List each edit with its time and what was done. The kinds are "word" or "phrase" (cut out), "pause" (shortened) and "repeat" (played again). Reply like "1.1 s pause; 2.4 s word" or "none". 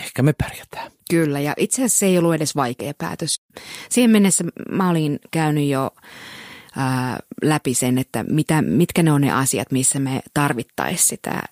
1.0 s pause